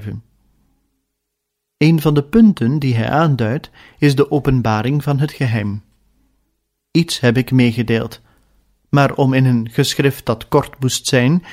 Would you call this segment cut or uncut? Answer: uncut